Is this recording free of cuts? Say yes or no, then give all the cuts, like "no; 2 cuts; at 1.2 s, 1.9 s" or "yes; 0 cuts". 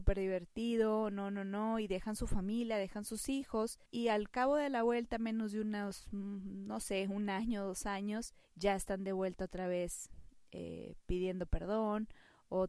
no; 2 cuts; at 3.9 s, 8.4 s